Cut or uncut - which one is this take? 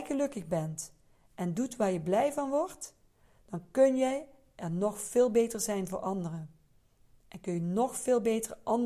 uncut